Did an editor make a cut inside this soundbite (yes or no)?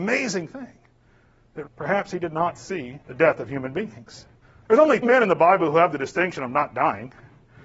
yes